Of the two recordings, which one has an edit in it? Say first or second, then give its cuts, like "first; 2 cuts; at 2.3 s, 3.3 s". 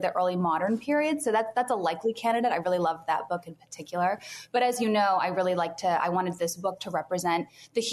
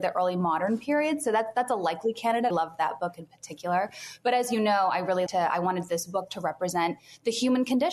second; 2 cuts; at 2.5 s, 5.3 s